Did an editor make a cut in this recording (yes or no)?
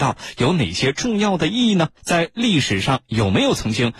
yes